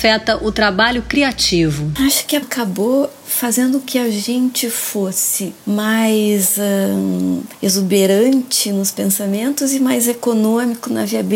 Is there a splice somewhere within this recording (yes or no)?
yes